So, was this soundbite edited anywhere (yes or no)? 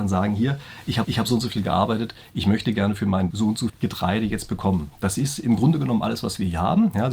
yes